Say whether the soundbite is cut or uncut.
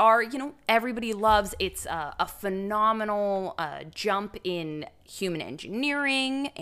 uncut